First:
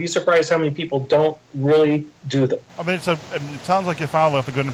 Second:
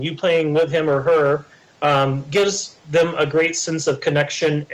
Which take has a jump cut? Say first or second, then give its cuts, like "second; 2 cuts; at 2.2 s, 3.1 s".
first; 2 cuts; at 2.2 s, 2.7 s